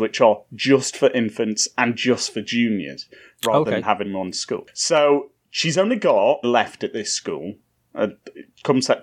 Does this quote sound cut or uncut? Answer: cut